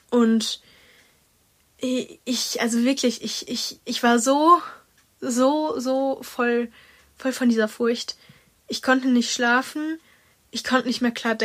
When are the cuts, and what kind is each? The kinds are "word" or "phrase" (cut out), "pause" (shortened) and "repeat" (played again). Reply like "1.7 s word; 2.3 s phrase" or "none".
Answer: none